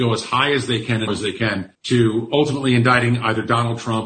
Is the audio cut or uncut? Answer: cut